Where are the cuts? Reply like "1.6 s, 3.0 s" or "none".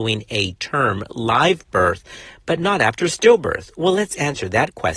none